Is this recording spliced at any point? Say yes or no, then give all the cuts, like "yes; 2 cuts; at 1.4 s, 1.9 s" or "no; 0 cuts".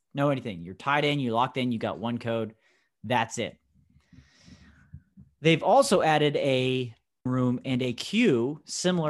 yes; 1 cut; at 7.3 s